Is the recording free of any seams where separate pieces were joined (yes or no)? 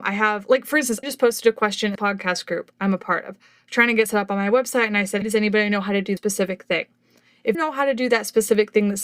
no